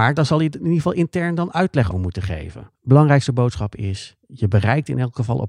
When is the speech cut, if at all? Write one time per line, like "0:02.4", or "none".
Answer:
0:01.9
0:02.7
0:04.2